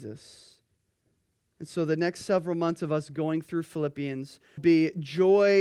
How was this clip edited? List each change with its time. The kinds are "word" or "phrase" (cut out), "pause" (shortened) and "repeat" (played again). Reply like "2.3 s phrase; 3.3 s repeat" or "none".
4.6 s word